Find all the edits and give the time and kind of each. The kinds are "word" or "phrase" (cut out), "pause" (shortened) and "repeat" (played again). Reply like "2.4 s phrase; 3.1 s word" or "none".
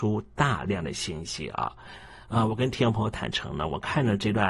none